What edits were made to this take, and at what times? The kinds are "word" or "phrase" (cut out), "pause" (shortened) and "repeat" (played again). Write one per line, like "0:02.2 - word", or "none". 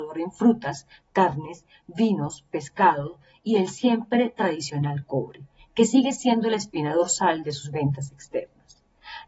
none

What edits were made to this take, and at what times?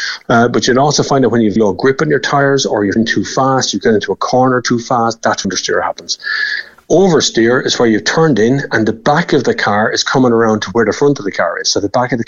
0:01.6 - word
0:03.0 - word
0:05.4 - word

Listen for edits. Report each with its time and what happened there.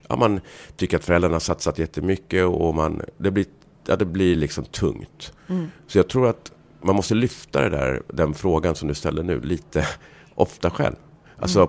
none

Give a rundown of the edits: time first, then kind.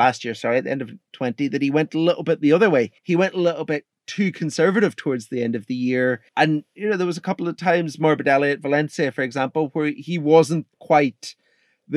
0:03.0 - pause
0:06.3 - pause

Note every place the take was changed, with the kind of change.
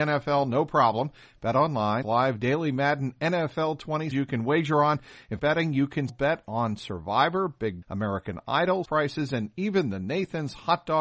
0:02.0 - word
0:04.1 - word
0:05.4 - phrase
0:06.1 - word
0:07.8 - word
0:08.8 - word

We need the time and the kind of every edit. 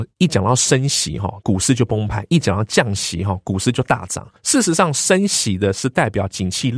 0:04.4 - pause

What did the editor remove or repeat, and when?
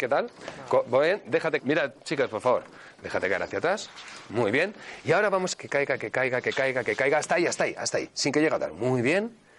0:01.6 - phrase
0:05.5 - phrase

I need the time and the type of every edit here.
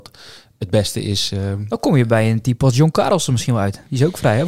none

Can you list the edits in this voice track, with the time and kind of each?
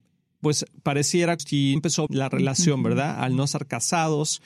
0:01.4 - word
0:01.8 - word
0:02.1 - word

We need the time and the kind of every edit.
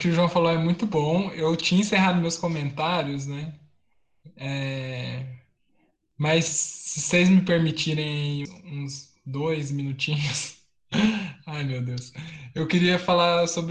0:08.5 - word

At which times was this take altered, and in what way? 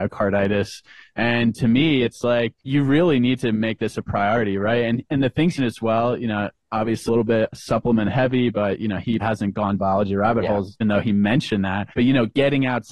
0:02.6 - pause
0:05.6 - phrase
0:07.1 - word
0:09.2 - word
0:09.8 - phrase
0:10.8 - word
0:11.9 - pause

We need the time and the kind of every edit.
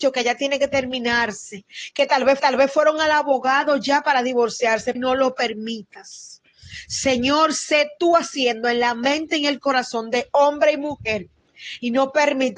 0:02.4 - repeat
0:04.9 - word

